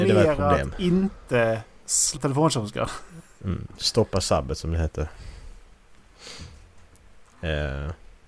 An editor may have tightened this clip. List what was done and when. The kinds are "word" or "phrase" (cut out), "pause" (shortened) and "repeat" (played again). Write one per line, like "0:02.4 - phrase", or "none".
0:02.2 - word

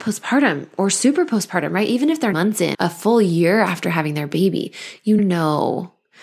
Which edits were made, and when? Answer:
0:02.3 - word
0:02.7 - word
0:05.2 - word

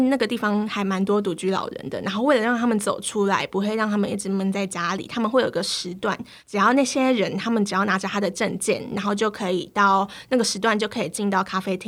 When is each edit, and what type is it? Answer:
0:06.4 - pause

